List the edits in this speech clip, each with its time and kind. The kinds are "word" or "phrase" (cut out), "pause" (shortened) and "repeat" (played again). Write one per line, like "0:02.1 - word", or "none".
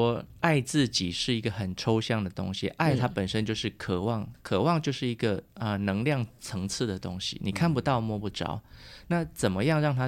none